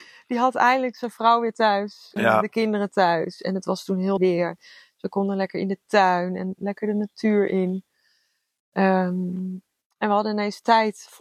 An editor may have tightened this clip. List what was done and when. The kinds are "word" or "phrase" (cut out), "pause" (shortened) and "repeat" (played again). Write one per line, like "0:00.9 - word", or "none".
0:02.2 - word
0:04.2 - word